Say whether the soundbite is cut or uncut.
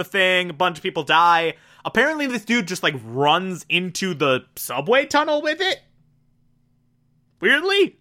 uncut